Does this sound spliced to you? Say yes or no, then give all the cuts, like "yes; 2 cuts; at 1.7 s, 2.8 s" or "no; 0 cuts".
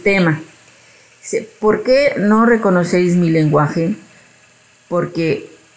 no; 0 cuts